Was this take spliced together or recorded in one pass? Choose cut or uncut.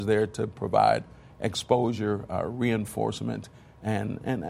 uncut